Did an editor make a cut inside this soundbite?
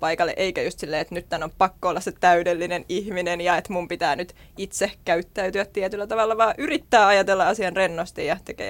no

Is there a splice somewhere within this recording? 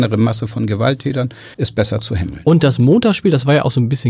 yes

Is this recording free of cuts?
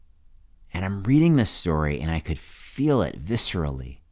yes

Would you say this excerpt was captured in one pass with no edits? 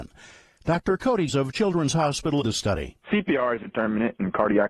no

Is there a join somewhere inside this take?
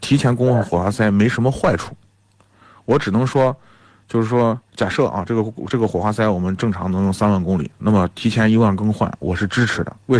yes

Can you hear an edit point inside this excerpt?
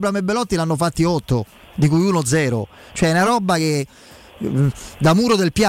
no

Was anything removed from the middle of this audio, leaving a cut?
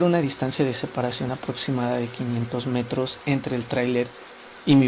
no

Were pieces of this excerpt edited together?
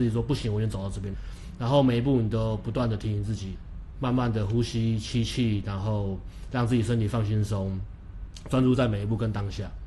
yes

